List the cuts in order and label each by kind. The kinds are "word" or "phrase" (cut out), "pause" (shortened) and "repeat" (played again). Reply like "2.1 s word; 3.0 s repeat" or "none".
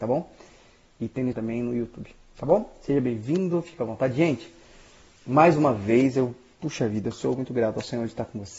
1.3 s word